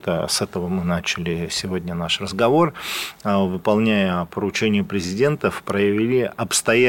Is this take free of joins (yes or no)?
yes